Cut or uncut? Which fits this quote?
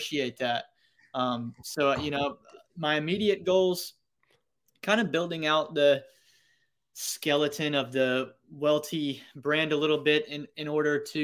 uncut